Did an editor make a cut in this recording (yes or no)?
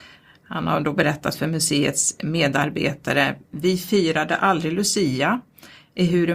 no